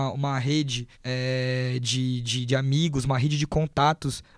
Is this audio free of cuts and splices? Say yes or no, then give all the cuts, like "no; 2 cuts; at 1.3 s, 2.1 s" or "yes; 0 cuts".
no; 1 cut; at 0.9 s